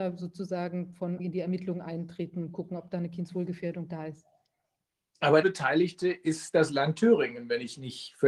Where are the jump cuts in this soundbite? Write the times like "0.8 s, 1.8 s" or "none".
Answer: 1.2 s, 5.4 s